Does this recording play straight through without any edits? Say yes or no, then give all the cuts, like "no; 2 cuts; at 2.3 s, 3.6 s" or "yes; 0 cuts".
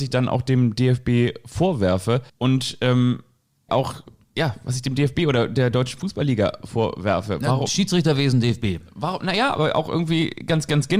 no; 2 cuts; at 2.3 s, 3.7 s